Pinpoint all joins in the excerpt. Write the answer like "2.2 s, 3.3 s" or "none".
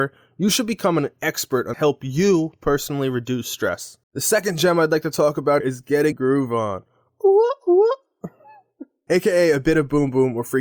1.7 s, 4.0 s, 5.6 s, 6.1 s